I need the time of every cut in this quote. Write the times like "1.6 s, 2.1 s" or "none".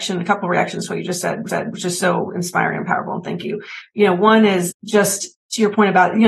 1.5 s, 5.3 s